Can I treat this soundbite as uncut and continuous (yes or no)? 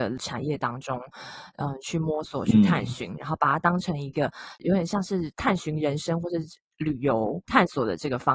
yes